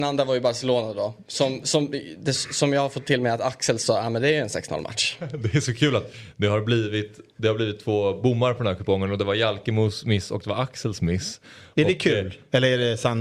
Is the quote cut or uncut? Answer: uncut